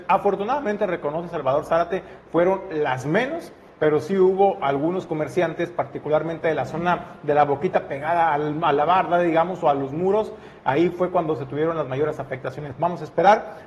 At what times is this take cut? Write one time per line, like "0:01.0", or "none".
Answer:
none